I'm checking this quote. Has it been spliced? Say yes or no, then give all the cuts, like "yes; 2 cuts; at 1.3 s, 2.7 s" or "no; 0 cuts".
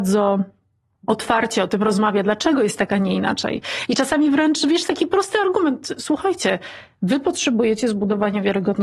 no; 0 cuts